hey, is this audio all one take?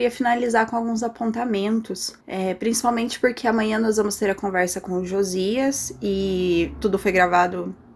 no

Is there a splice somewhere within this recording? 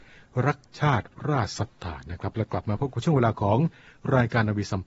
no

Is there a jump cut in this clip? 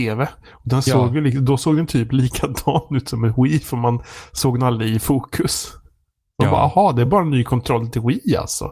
no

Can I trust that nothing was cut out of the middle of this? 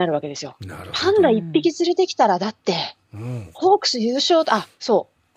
yes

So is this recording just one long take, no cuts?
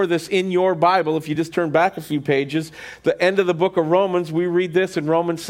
yes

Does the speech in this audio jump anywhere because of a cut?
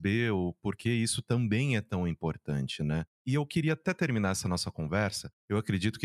no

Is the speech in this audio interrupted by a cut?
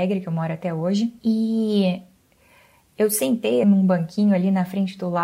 yes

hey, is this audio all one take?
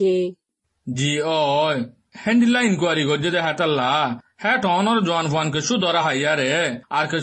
yes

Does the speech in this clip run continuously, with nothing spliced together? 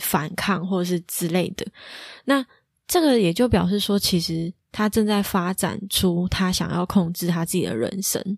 yes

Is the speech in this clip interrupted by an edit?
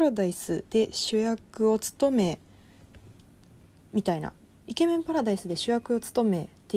no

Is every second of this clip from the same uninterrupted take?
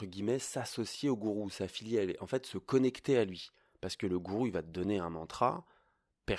yes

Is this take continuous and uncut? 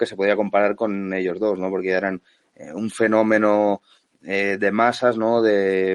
yes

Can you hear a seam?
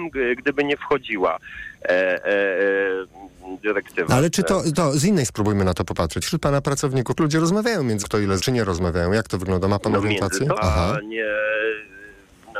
yes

